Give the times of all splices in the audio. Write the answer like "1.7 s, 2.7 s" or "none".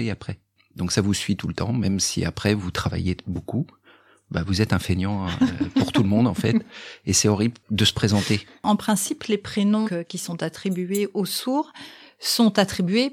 9.8 s